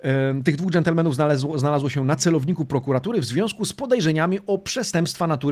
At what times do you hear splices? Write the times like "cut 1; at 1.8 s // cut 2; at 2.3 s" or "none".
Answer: none